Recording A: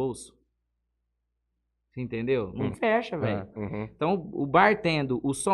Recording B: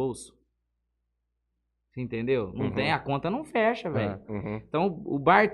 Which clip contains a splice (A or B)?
A